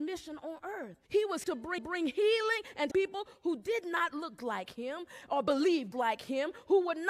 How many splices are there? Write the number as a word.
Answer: six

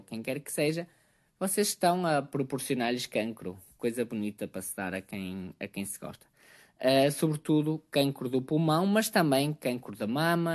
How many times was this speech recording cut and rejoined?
zero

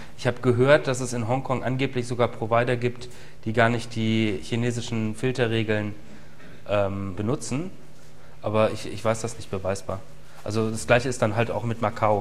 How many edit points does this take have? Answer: one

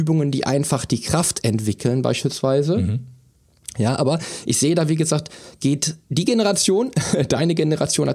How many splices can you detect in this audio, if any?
one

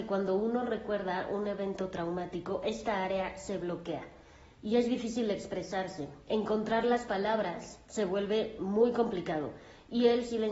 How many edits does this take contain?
zero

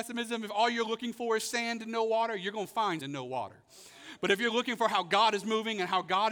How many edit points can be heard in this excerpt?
one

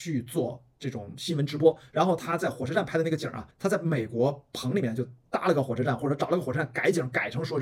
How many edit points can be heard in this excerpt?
one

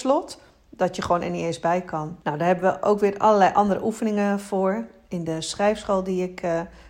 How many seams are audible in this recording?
one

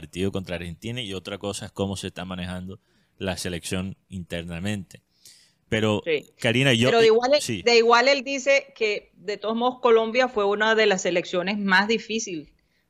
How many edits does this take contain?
zero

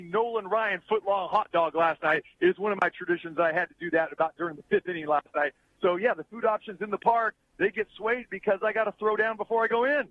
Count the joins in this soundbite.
zero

